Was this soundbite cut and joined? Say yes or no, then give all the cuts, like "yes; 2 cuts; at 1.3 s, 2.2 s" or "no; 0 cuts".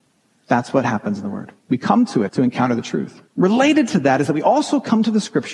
yes; 3 cuts; at 1.6 s, 2.3 s, 3.3 s